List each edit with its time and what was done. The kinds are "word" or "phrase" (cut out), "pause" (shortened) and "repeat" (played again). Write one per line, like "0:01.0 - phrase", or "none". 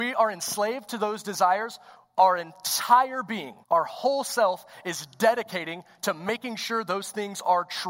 0:03.6 - pause